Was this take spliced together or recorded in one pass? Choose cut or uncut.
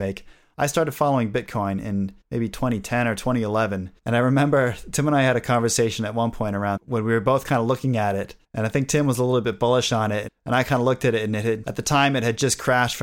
cut